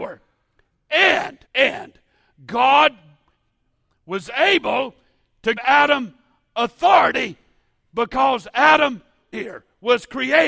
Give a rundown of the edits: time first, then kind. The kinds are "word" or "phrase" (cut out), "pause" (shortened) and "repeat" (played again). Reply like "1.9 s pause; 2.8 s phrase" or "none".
1.5 s pause; 5.6 s word; 9.3 s phrase